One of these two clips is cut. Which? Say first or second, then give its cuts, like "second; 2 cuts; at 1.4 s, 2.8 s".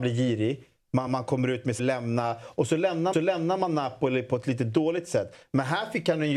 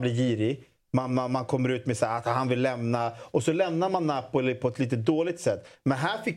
first; 3 cuts; at 1.1 s, 1.8 s, 3.1 s